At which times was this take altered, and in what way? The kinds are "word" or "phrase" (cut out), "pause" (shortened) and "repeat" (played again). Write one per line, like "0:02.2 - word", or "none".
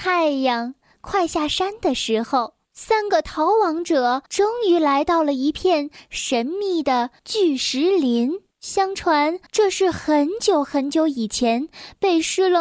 0:02.6 - pause
0:04.3 - pause
0:07.2 - pause
0:08.5 - pause
0:09.5 - pause